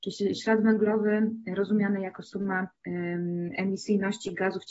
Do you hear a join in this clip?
yes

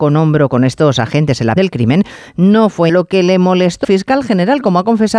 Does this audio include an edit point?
yes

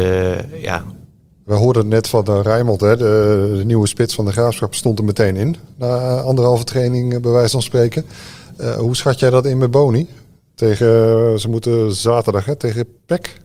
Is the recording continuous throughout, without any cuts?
yes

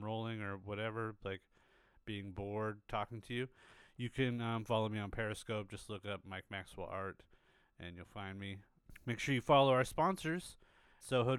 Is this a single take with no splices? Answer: yes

